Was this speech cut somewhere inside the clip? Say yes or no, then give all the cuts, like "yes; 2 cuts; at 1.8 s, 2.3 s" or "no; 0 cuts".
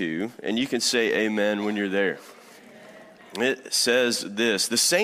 no; 0 cuts